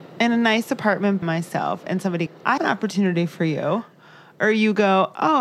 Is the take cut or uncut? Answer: cut